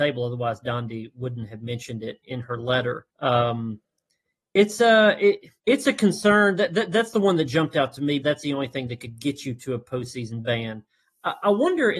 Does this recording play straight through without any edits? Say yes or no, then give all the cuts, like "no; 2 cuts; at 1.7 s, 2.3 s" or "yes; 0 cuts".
no; 4 cuts; at 2.2 s, 3.1 s, 5.6 s, 8.2 s